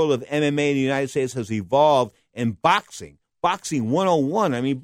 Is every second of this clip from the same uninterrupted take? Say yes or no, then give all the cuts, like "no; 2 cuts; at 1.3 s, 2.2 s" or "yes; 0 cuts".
yes; 0 cuts